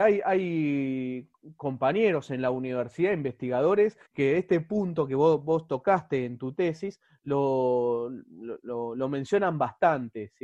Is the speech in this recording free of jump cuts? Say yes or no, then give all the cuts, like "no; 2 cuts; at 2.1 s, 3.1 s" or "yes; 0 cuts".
no; 1 cut; at 4.1 s